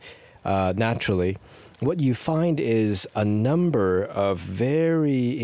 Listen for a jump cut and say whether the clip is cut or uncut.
uncut